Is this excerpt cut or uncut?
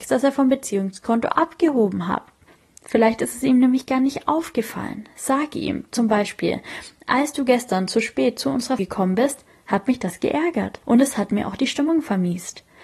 cut